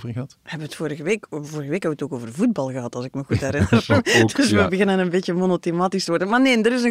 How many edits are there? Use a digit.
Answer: 0